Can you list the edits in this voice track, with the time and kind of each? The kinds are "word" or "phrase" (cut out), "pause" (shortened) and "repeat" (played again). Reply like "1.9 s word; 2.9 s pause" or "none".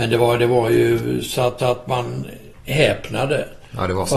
1.6 s repeat